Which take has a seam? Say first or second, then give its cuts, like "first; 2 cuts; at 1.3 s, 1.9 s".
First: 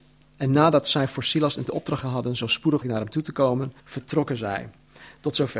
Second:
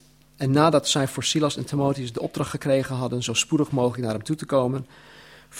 first; 4 cuts; at 1.7 s, 2.0 s, 2.8 s, 3.8 s